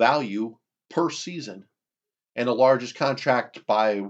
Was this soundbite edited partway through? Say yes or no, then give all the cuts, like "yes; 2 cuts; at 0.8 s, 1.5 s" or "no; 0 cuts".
no; 0 cuts